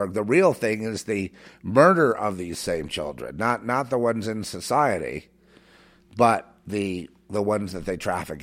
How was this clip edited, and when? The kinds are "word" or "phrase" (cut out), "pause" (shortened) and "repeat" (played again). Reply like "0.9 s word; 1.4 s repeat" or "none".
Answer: none